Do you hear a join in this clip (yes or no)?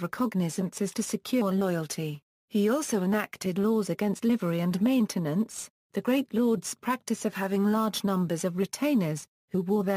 yes